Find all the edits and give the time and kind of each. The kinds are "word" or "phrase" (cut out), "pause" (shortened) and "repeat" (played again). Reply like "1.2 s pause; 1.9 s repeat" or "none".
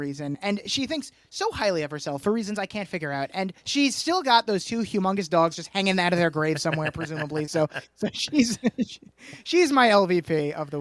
3.6 s pause